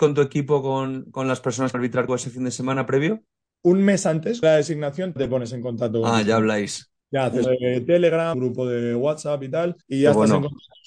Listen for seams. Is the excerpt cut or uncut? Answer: cut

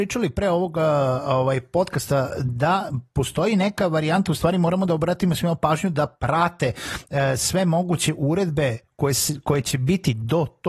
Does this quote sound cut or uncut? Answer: uncut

